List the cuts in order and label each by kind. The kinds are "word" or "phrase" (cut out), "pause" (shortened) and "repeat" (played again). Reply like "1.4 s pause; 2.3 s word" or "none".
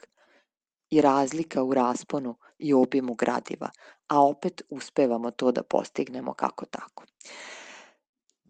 none